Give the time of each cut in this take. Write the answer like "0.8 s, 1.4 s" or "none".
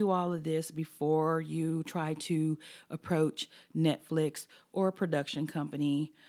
none